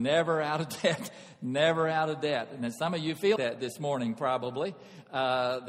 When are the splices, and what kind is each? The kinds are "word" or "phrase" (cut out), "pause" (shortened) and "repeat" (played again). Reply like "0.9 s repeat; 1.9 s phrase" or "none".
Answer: 3.4 s word